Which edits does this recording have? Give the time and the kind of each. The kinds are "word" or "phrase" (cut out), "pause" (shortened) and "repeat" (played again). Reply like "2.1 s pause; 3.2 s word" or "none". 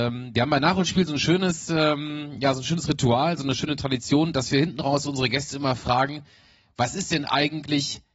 none